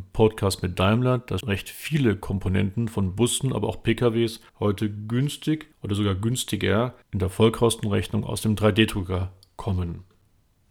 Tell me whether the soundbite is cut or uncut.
cut